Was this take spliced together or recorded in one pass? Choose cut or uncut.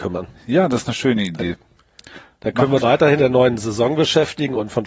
cut